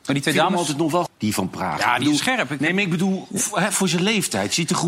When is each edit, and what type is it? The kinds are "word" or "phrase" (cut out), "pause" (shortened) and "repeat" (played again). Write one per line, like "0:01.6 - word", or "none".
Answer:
0:01.1 - word